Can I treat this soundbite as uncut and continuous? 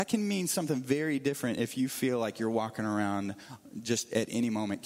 yes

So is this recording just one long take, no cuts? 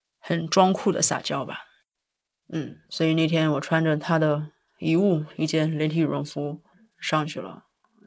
yes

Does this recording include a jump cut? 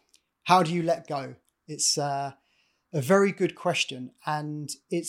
no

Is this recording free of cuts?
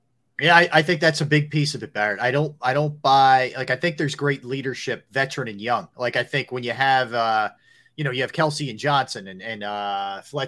yes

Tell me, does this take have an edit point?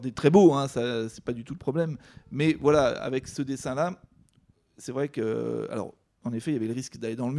no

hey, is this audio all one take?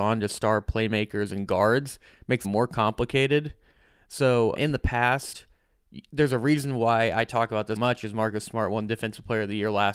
no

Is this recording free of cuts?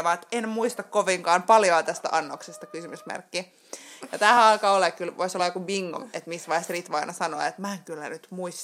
yes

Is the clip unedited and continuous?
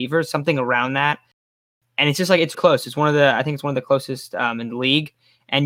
no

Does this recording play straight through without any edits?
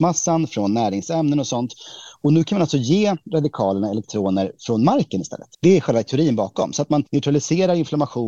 no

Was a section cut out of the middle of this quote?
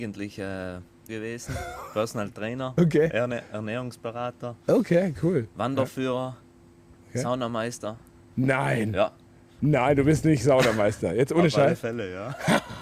yes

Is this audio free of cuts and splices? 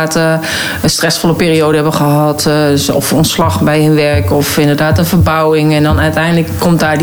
yes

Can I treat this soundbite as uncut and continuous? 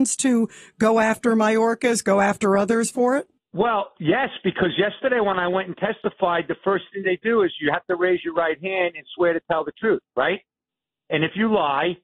no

